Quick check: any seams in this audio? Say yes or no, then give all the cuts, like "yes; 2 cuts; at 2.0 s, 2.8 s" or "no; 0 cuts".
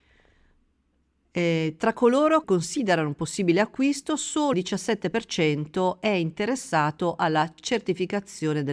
yes; 2 cuts; at 2.4 s, 4.5 s